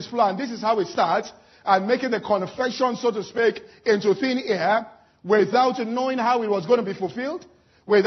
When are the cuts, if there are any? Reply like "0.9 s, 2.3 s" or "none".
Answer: none